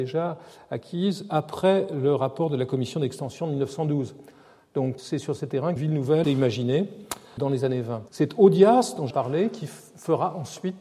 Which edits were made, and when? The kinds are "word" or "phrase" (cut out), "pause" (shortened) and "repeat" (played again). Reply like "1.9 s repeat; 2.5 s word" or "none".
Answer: 5.0 s word; 5.8 s word; 6.2 s phrase; 7.4 s word; 8.1 s pause; 9.1 s word